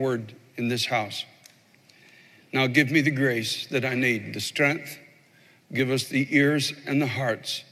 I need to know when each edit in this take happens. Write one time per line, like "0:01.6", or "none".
none

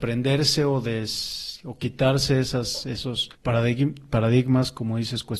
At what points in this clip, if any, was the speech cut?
0:03.3

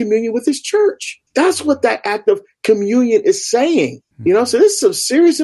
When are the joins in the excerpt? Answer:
0:01.3
0:04.1

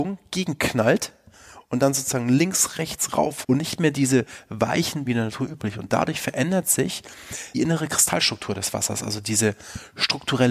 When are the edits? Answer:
0:03.4
0:05.1
0:07.5

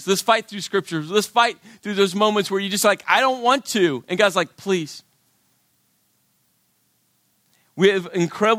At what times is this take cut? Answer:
none

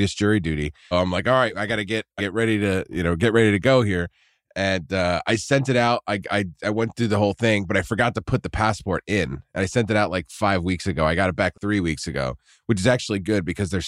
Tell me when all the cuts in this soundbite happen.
0:00.9
0:02.2
0:11.5

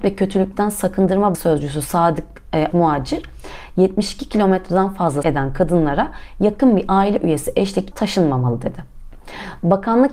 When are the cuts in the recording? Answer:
0:01.3
0:02.7
0:05.2
0:07.9

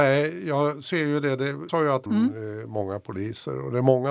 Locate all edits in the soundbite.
0:01.7
0:02.1

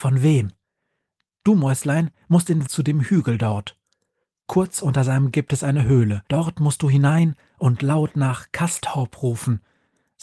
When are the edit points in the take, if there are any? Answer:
0:02.7
0:05.3
0:06.3

